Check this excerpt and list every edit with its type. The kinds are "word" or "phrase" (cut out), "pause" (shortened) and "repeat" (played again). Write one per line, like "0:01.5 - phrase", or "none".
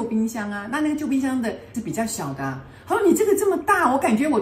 0:01.7 - word